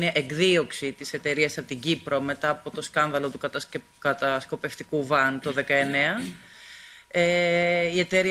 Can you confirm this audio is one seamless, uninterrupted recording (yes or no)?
yes